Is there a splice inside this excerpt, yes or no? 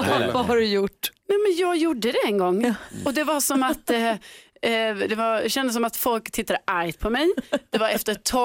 no